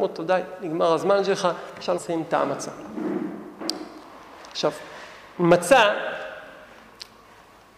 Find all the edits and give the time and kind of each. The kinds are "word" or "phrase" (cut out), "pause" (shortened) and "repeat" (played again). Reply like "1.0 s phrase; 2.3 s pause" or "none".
2.0 s word